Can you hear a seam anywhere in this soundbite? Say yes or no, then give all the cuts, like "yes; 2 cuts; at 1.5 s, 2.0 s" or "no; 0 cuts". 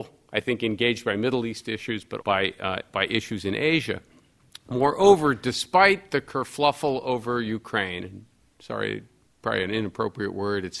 yes; 1 cut; at 2.2 s